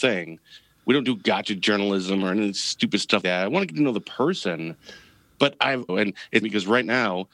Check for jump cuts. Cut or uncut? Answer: cut